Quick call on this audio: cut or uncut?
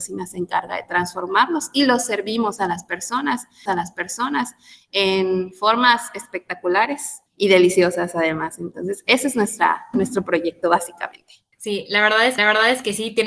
cut